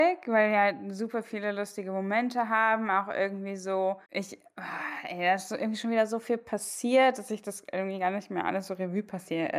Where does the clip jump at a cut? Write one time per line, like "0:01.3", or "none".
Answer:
0:04.1

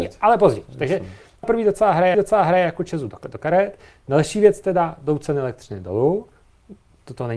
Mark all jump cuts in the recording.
0:01.4
0:02.1

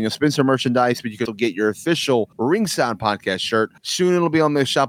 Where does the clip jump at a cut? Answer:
0:01.3
0:02.3
0:03.8

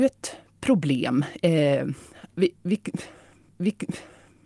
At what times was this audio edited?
0:03.5

